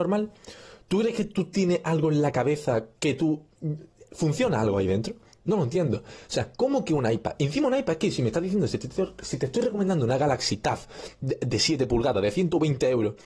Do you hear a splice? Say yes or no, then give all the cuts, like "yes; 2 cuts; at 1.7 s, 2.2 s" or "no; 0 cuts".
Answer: no; 0 cuts